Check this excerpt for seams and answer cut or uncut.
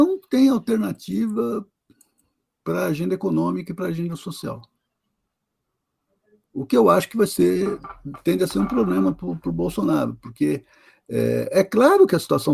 uncut